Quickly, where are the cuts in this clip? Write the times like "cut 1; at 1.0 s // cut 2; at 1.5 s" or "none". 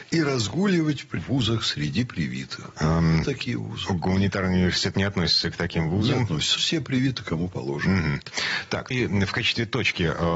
cut 1; at 1.2 s // cut 2; at 3.2 s // cut 3; at 4.9 s // cut 4; at 6.6 s // cut 5; at 8.9 s